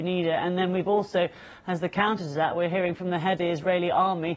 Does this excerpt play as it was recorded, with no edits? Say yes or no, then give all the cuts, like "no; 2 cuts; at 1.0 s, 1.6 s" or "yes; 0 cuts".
no; 1 cut; at 3.4 s